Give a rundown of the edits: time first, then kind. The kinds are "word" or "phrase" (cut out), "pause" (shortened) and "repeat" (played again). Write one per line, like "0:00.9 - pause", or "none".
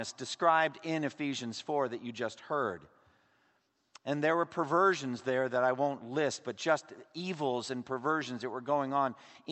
none